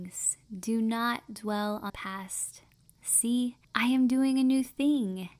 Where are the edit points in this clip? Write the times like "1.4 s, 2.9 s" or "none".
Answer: 1.9 s, 3.6 s